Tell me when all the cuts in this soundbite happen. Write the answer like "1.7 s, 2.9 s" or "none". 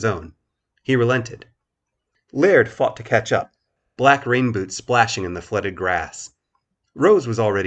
none